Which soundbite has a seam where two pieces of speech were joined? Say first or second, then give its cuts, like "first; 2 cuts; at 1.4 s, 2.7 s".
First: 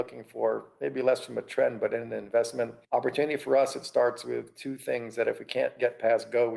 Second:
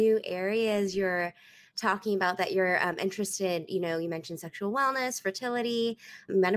first; 1 cut; at 2.8 s